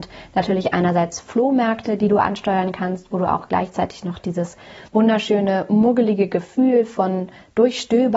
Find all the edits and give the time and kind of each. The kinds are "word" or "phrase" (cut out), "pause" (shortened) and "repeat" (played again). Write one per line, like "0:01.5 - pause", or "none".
0:04.9 - pause